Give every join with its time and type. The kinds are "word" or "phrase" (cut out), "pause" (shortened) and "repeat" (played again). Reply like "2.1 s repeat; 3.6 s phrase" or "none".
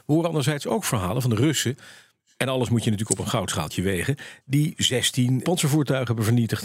5.4 s word